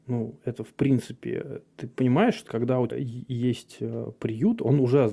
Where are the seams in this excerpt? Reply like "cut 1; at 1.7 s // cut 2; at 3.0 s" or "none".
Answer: cut 1; at 2.5 s // cut 2; at 2.9 s